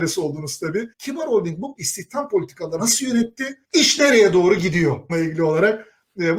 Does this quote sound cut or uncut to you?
cut